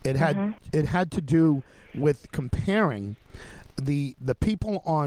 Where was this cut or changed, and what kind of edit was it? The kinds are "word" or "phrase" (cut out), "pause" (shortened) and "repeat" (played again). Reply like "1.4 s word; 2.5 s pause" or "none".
none